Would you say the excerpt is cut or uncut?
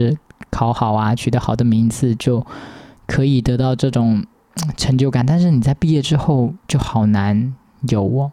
cut